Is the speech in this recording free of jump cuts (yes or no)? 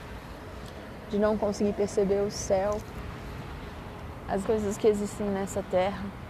no